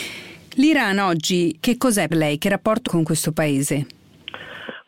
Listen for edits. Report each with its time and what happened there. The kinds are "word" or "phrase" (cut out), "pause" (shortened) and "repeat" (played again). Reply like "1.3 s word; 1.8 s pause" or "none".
1.6 s word; 2.1 s word; 2.9 s word